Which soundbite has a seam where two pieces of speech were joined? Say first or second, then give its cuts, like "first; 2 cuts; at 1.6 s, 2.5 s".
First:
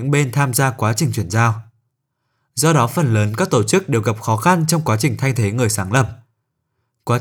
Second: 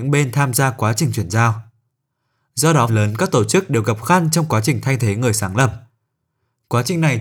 second; 2 cuts; at 2.9 s, 4.0 s